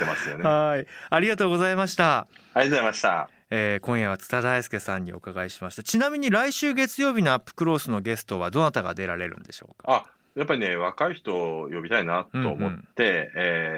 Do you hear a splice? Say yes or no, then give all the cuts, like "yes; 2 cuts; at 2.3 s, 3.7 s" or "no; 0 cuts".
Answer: no; 0 cuts